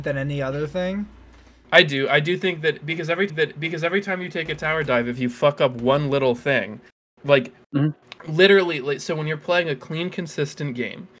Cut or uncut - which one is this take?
cut